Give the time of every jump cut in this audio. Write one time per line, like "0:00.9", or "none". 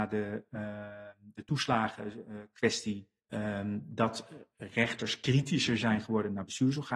0:03.2